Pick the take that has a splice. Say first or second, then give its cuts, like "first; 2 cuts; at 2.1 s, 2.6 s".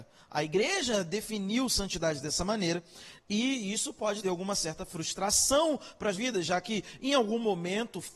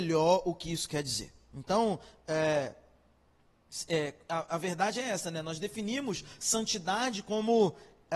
first; 2 cuts; at 4.2 s, 6.1 s